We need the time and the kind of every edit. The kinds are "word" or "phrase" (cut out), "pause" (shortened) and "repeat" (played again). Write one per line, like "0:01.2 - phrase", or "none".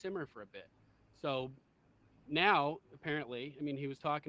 0:02.8 - pause